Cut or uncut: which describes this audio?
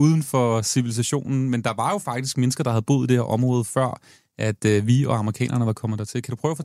uncut